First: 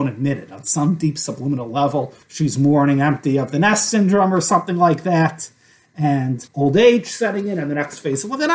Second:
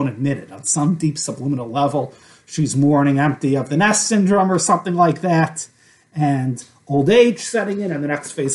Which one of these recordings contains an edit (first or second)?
first